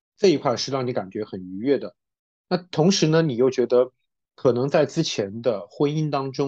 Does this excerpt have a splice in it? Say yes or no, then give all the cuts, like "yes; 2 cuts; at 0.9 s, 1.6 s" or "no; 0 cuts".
no; 0 cuts